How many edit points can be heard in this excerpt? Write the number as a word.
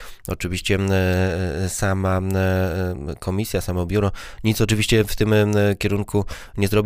zero